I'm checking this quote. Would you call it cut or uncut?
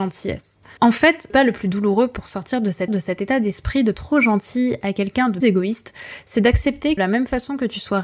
cut